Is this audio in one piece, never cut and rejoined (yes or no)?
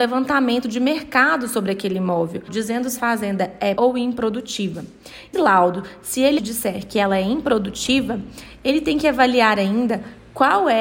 no